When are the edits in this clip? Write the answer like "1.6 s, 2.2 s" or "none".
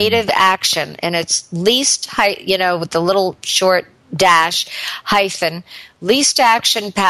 none

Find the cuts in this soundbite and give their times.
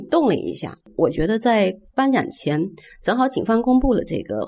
none

